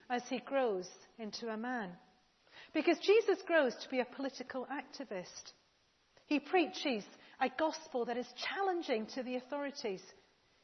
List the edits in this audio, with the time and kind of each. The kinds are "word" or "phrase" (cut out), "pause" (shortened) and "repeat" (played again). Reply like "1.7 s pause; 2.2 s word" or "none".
none